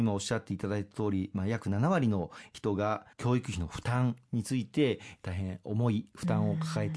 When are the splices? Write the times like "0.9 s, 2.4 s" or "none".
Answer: 3.1 s